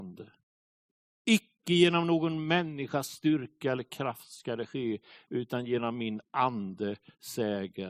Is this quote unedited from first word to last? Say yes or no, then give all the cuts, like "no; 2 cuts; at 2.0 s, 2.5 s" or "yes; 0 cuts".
yes; 0 cuts